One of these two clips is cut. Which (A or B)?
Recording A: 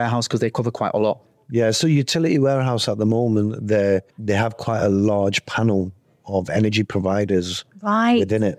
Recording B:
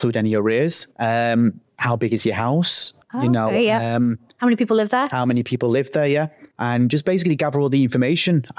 B